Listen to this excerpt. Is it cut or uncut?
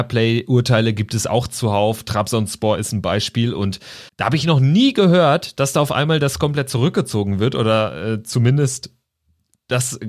cut